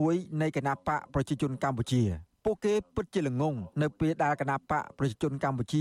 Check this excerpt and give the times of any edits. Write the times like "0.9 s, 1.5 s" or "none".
2.3 s, 3.7 s